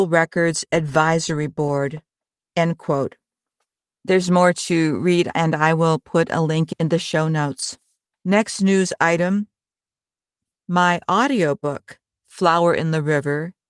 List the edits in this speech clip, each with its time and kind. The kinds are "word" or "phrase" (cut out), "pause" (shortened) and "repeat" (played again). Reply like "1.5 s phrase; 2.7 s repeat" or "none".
none